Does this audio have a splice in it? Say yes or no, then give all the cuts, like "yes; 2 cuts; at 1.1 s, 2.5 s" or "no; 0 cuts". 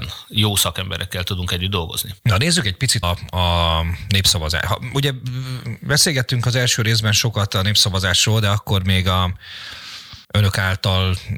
yes; 3 cuts; at 2.2 s, 3.0 s, 10.2 s